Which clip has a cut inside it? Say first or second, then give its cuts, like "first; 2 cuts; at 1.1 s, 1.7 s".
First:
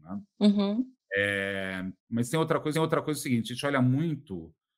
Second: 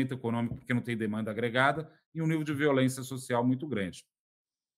first; 2 cuts; at 2.0 s, 2.7 s